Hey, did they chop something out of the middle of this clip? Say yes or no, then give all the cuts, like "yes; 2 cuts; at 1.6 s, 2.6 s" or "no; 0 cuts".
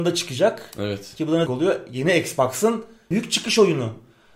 yes; 2 cuts; at 1.5 s, 3.1 s